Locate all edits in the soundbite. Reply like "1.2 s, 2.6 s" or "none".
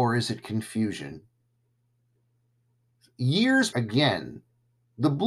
3.7 s